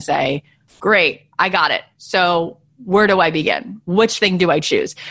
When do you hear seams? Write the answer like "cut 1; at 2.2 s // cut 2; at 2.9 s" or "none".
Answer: none